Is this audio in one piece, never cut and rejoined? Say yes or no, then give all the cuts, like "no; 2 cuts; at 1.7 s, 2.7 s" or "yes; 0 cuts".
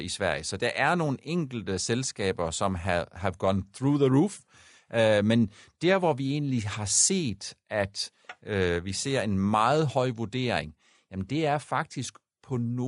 yes; 0 cuts